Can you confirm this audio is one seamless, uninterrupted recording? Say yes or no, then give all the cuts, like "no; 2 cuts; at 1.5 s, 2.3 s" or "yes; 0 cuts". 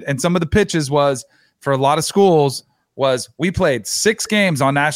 yes; 0 cuts